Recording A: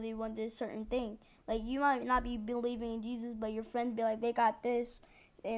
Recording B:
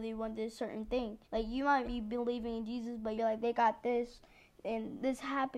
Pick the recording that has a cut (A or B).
B